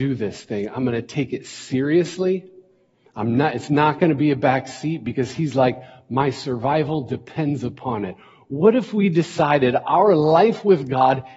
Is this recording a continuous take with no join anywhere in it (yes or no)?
yes